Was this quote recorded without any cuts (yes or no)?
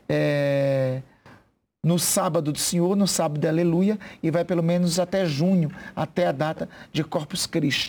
yes